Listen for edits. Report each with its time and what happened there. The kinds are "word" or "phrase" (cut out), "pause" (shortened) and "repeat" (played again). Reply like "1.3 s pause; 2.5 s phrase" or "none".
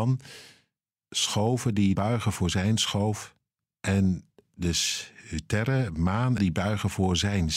1.9 s word; 6.4 s phrase